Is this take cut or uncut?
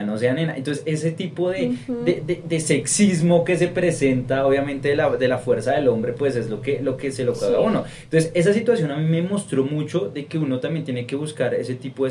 uncut